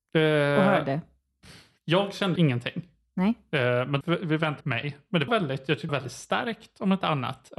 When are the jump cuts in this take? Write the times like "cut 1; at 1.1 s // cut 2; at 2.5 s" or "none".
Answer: cut 1; at 2.4 s // cut 2; at 4.0 s // cut 3; at 4.6 s // cut 4; at 5.3 s // cut 5; at 5.9 s